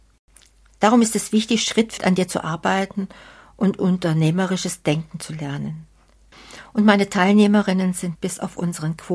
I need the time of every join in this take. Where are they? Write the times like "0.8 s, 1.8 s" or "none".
2.0 s, 8.1 s